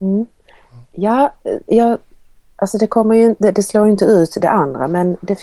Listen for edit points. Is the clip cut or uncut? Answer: uncut